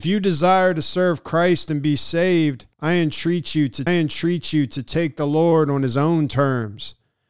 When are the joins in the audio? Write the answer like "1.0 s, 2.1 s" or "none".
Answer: 2.7 s, 3.9 s